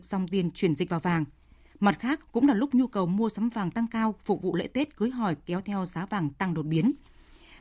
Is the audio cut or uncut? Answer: cut